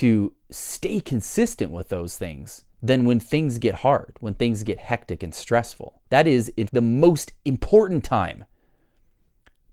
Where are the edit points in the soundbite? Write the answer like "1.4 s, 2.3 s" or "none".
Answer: 2.7 s, 6.1 s, 6.7 s

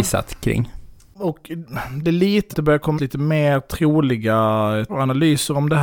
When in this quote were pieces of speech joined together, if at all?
2.5 s, 3.0 s, 4.9 s

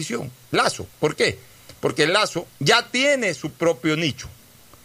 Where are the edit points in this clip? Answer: 0.9 s, 2.5 s

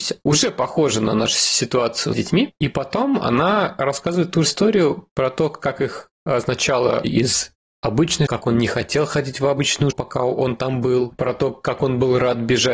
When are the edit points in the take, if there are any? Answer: 2.1 s, 4.5 s, 7.0 s, 8.3 s, 9.9 s

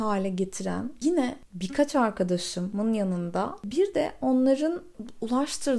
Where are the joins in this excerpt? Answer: none

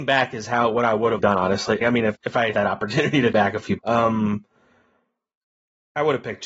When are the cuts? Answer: 1.2 s, 1.8 s, 2.1 s, 2.5 s, 3.3 s, 3.8 s

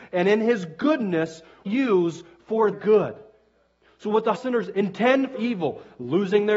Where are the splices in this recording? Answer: 1.7 s, 2.7 s, 4.3 s, 5.3 s

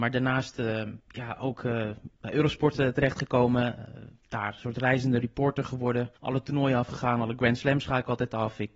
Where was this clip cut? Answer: 1.0 s, 6.2 s

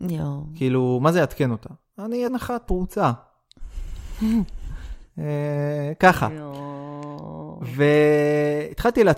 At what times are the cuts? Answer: 2.3 s, 2.7 s

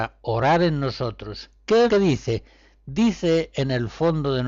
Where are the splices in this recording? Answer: 1.9 s

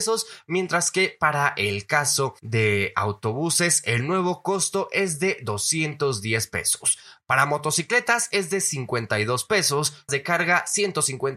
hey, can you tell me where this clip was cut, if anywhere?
10.1 s

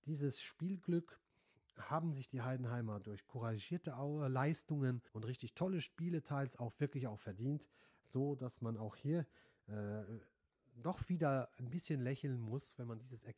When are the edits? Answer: 5.1 s

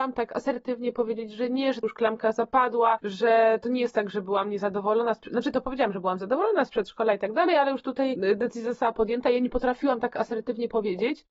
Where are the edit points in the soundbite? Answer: 1.8 s

